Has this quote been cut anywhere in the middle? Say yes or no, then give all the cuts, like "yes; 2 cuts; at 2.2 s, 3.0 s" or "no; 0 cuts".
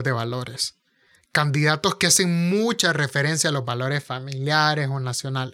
no; 0 cuts